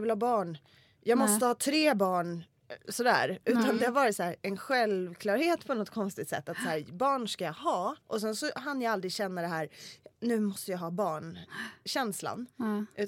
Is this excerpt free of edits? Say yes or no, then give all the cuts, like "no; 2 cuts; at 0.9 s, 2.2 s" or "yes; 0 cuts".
no; 2 cuts; at 8.0 s, 10.1 s